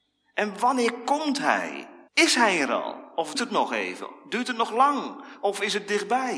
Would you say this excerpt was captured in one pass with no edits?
no; 2 cuts; at 2.1 s, 3.3 s

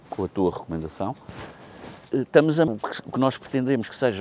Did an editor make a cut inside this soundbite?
yes; 2 cuts; at 2.0 s, 2.7 s

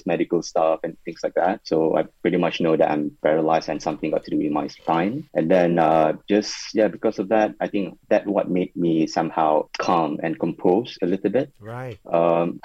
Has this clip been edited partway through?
no; 0 cuts

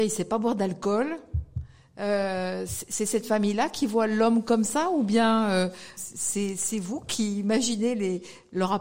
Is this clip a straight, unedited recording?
no; 1 cut; at 6.0 s

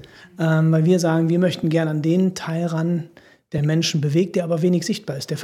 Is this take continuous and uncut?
yes; 0 cuts

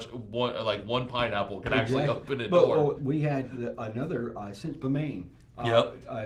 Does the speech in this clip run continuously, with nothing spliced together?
no; 2 cuts; at 3.0 s, 4.8 s

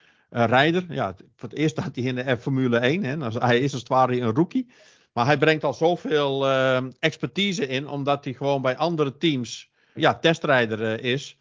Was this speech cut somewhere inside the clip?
yes; 1 cut; at 10.0 s

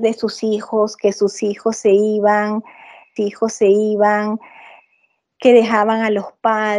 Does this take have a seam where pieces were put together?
yes; 1 cut; at 3.2 s

